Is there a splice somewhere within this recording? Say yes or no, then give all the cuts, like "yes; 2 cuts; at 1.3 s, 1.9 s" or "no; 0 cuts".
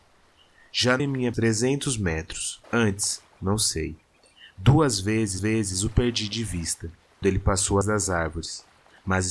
yes; 6 cuts; at 1.0 s, 1.3 s, 2.6 s, 5.4 s, 7.2 s, 7.8 s